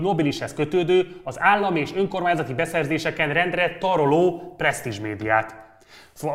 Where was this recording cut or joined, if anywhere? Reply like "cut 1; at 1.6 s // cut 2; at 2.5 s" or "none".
none